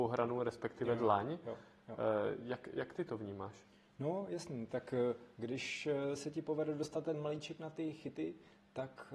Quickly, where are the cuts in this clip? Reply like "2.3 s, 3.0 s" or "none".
none